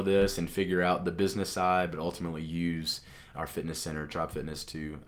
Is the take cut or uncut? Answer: cut